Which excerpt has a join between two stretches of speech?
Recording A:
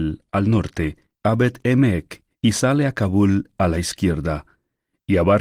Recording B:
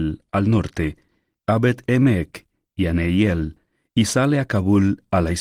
A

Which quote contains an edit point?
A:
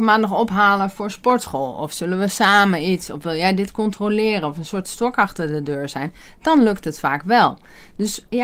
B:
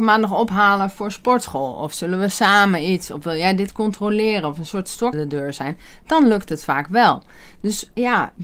B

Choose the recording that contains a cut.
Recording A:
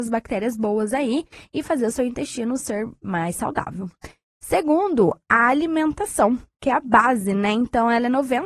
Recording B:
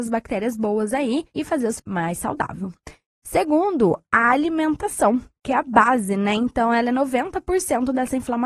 B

